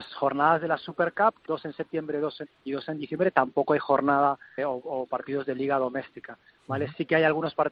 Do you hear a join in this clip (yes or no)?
yes